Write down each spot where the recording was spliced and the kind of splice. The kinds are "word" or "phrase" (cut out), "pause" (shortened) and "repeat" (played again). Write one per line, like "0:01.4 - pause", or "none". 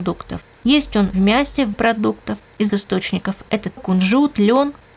0:01.1 - word
0:01.7 - word
0:02.7 - word
0:03.8 - word